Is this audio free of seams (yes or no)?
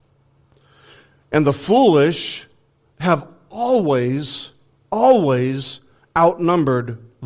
yes